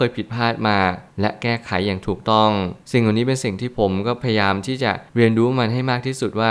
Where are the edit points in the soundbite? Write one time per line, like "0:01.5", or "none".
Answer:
0:01.1
0:02.8
0:05.1

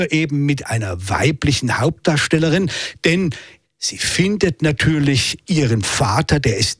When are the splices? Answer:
none

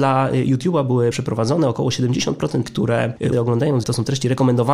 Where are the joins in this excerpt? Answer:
0:01.1
0:02.7
0:03.3
0:03.8

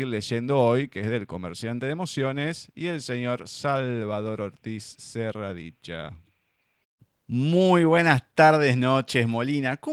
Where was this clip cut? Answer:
none

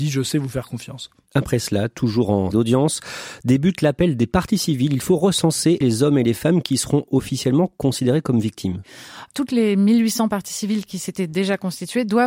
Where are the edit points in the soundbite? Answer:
0:02.5
0:05.8

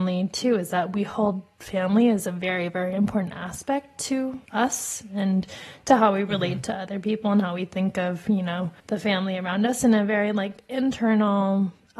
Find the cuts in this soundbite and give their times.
0:04.4
0:08.8

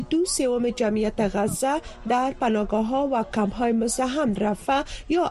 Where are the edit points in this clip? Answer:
0:04.4

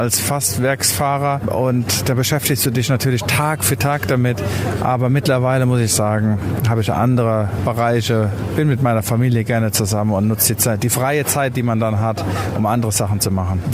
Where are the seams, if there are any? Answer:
none

